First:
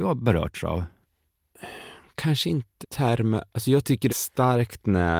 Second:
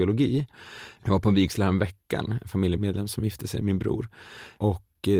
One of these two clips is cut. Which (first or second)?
first